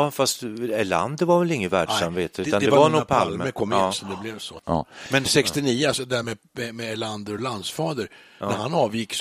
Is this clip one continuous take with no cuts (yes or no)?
yes